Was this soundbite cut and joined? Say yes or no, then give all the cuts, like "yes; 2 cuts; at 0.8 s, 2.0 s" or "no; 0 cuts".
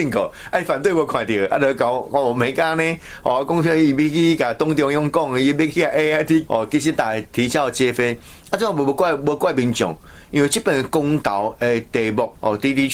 yes; 1 cut; at 6.5 s